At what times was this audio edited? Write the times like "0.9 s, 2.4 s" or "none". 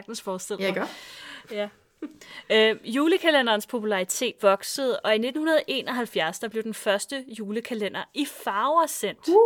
4.4 s